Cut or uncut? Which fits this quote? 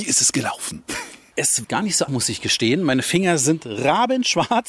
cut